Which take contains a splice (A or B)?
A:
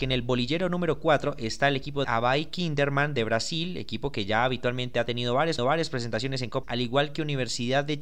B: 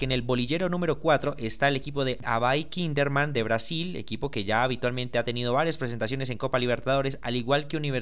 A